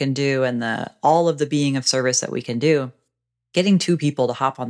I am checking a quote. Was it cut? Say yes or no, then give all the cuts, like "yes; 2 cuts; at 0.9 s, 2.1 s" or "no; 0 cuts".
no; 0 cuts